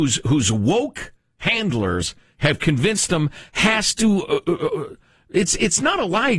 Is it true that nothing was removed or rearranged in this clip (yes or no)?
yes